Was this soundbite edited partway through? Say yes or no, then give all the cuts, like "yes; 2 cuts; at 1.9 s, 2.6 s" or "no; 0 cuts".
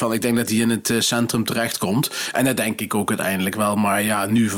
no; 0 cuts